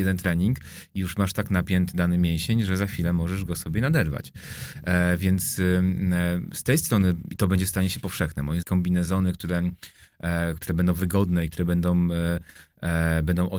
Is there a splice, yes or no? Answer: yes